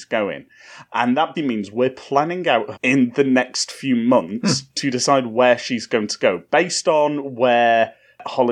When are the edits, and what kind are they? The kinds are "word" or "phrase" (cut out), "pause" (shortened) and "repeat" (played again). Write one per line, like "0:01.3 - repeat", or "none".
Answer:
0:01.3 - word
0:02.7 - phrase